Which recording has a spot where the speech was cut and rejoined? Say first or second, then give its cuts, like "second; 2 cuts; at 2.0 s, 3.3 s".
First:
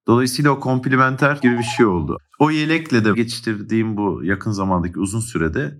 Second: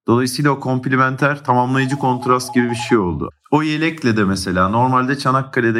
first; 2 cuts; at 1.4 s, 3.1 s